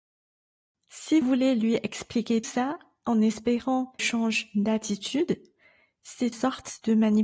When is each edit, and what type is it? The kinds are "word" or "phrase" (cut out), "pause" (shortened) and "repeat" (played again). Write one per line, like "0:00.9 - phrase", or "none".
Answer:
0:01.2 - word
0:02.4 - word
0:04.0 - word
0:06.3 - word